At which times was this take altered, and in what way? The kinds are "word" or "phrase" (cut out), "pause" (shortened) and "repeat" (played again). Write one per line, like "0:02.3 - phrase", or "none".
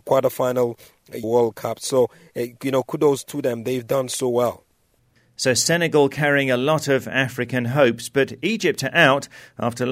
0:01.2 - phrase

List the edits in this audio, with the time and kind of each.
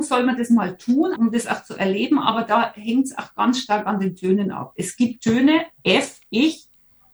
0:01.2 - word

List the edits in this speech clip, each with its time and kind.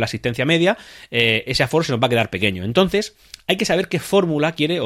0:01.5 - word

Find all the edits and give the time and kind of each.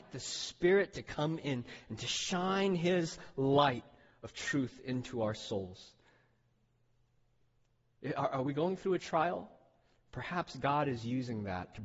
none

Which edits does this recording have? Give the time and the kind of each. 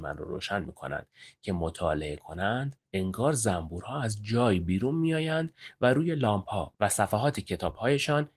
0:02.8 - pause

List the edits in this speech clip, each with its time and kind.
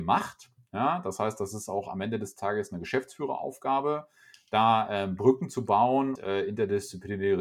0:06.2 - word

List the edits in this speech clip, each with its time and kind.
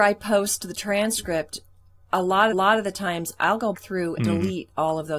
0:02.5 - repeat
0:03.7 - word
0:04.2 - word

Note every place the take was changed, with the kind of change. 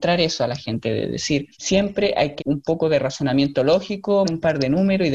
0:01.5 - pause
0:02.4 - word
0:04.2 - word

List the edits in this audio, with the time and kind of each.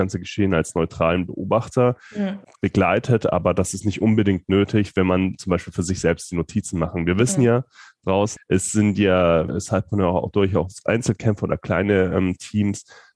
0:09.5 - word

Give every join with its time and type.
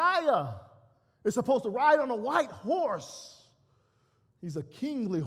none

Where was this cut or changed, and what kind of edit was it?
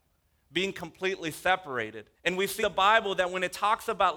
0:02.1 - pause
0:02.6 - word

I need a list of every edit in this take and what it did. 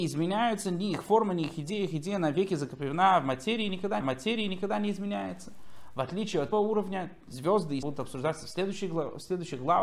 0:04.0 - repeat
0:06.5 - phrase
0:07.8 - phrase

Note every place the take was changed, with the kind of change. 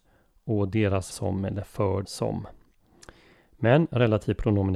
0:01.1 - word
0:02.0 - word

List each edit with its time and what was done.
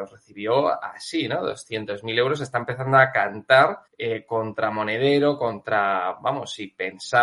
0:03.9 - pause

